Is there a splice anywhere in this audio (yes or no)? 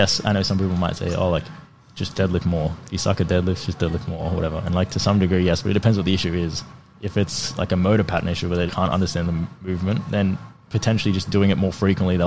yes